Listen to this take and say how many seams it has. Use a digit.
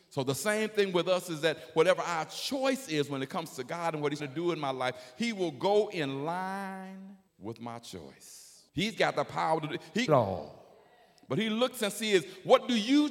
4